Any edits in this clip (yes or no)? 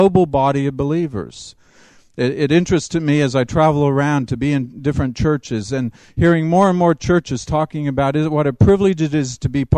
no